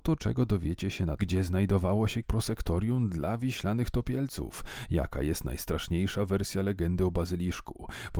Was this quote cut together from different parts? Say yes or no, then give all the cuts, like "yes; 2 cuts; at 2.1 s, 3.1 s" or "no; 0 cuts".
yes; 2 cuts; at 1.2 s, 2.2 s